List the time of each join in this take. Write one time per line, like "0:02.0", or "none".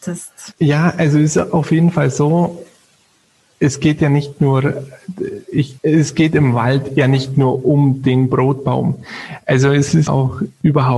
0:10.1